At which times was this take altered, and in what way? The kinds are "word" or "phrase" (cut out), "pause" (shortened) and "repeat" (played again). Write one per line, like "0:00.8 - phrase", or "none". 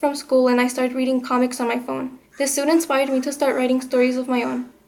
0:02.3 - pause